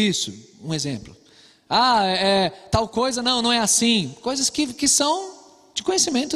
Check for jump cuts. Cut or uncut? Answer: uncut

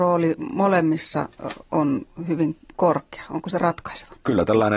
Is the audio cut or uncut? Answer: uncut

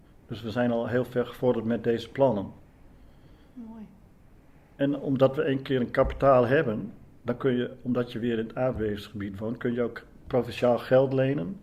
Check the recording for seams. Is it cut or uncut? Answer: uncut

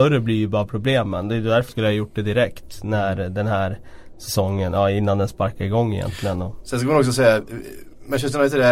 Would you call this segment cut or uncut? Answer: cut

